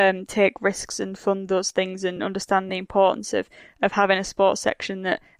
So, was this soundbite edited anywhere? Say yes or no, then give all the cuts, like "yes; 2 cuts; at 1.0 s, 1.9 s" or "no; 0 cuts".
no; 0 cuts